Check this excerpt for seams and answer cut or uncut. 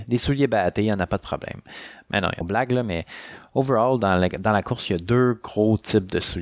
cut